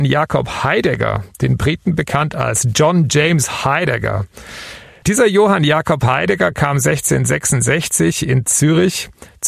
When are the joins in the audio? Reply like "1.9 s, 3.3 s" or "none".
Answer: none